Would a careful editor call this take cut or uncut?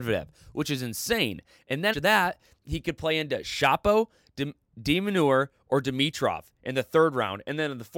cut